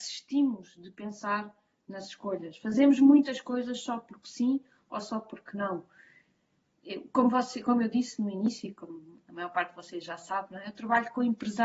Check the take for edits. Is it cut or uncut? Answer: uncut